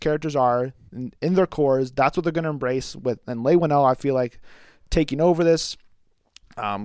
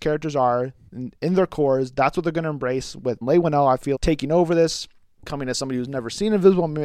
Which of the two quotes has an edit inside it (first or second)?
second